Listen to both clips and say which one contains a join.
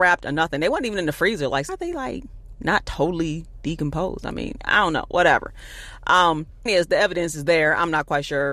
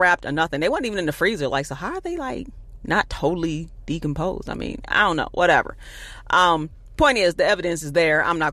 first; 2 cuts; at 1.7 s, 6.7 s

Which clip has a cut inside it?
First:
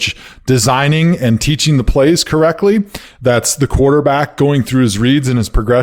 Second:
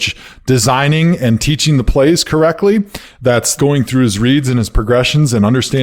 second; 1 cut; at 3.6 s

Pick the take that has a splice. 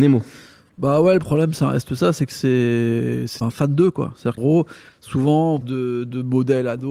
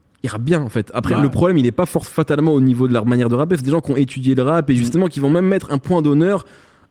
first; 3 cuts; at 3.4 s, 4.4 s, 5.6 s

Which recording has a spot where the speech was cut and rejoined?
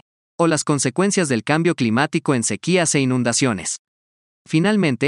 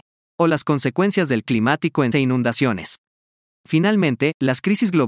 second; 2 cuts; at 1.5 s, 2.1 s

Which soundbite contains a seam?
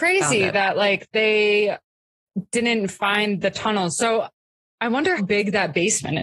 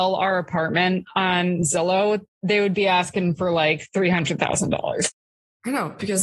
first; 1 cut; at 5.2 s

